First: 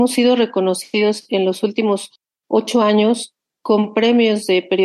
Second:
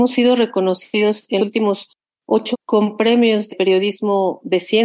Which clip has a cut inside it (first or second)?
second